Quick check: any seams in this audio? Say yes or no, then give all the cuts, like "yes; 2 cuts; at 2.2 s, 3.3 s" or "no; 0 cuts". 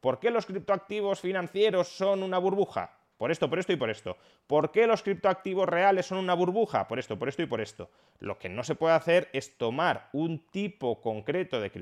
no; 0 cuts